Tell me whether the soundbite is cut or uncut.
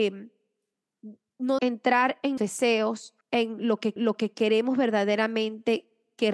cut